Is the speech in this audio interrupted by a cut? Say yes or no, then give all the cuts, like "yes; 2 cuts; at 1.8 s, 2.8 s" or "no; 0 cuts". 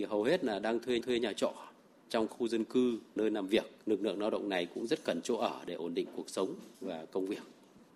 yes; 5 cuts; at 1.0 s, 2.3 s, 3.2 s, 3.8 s, 6.7 s